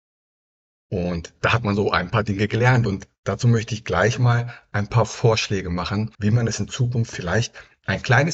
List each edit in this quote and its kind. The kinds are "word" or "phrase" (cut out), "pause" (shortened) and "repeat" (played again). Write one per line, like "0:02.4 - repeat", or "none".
0:06.1 - pause